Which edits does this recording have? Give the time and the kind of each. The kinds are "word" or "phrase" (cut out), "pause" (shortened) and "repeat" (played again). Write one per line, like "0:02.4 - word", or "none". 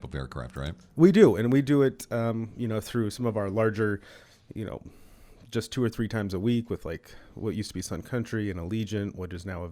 none